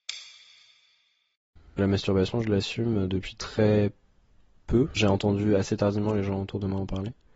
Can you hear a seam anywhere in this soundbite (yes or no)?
no